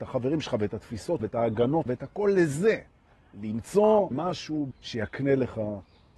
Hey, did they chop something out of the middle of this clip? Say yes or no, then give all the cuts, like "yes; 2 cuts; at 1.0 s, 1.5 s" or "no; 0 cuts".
yes; 4 cuts; at 1.2 s, 1.9 s, 4.1 s, 4.7 s